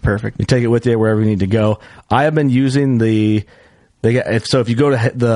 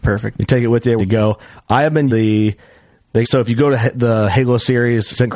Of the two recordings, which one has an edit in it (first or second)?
second